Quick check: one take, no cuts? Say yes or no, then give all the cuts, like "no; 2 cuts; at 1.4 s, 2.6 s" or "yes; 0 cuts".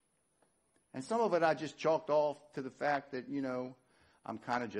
yes; 0 cuts